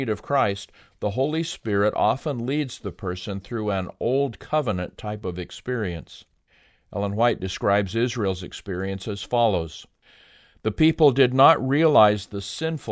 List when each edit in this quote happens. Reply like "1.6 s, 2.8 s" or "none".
none

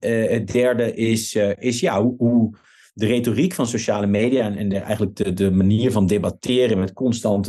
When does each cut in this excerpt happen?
none

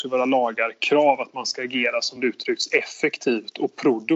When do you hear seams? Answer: none

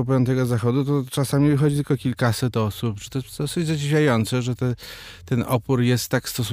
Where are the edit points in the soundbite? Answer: none

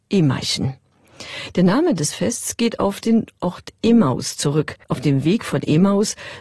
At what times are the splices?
4.8 s

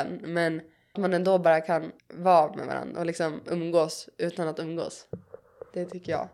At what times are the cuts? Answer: 1.0 s, 2.0 s

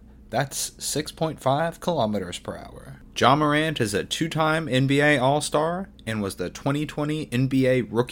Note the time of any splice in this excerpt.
none

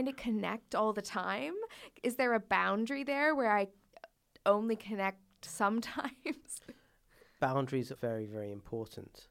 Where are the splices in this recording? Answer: 7.4 s, 8.0 s

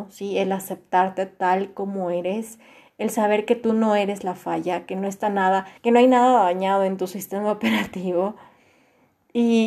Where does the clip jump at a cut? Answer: 5.8 s

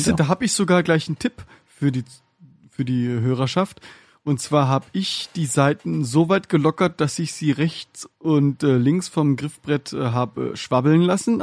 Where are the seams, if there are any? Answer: none

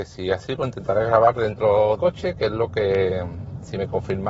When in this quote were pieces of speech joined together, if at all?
2.0 s

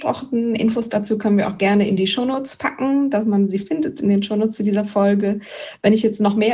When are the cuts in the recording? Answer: none

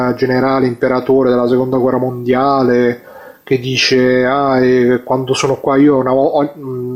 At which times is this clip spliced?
none

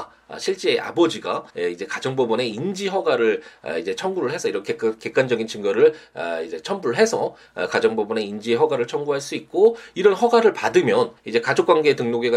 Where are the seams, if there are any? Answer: 1.5 s, 11.2 s

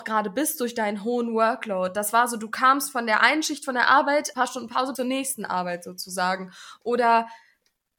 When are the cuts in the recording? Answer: 4.3 s, 4.9 s

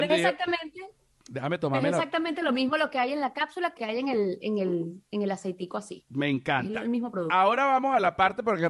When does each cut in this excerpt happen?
3.8 s

